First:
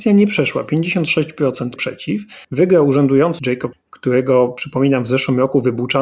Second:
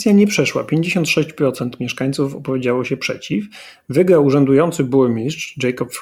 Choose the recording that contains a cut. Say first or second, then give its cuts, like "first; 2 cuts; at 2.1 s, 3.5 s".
first; 4 cuts; at 1.8 s, 2.4 s, 3.4 s, 3.7 s